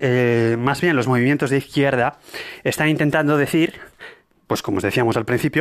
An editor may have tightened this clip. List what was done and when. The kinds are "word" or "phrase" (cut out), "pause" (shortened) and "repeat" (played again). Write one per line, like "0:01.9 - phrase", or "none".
none